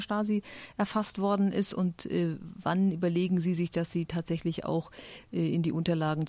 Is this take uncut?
yes; 0 cuts

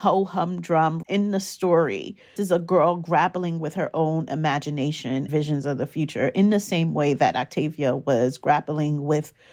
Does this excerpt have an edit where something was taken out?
yes; 3 cuts; at 1.0 s, 2.4 s, 5.3 s

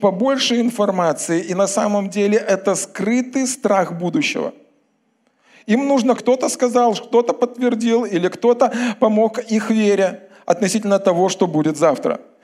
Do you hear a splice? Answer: yes; 1 cut; at 6.2 s

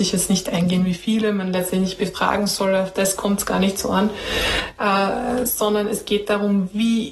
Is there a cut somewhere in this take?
no; 0 cuts

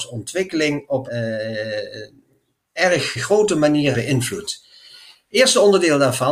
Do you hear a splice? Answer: yes; 3 cuts; at 1.1 s, 3.2 s, 3.9 s

